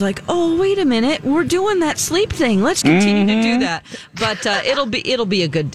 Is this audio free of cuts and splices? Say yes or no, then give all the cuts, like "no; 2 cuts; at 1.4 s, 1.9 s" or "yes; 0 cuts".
no; 1 cut; at 2.8 s